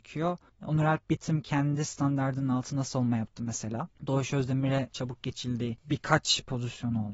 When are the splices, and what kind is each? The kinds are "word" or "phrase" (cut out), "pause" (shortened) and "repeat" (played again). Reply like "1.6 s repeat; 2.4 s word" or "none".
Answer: none